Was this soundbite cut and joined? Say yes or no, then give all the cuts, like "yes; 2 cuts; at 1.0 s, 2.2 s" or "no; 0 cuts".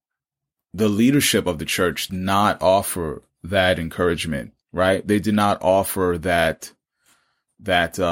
yes; 2 cuts; at 2.1 s, 4.6 s